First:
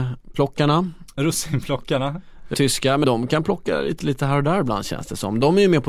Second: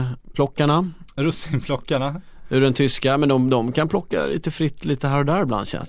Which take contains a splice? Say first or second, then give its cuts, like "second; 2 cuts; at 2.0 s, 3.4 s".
first; 3 cuts; at 2.5 s, 3.0 s, 4.0 s